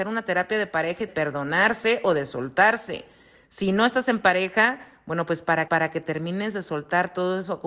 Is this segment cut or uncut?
cut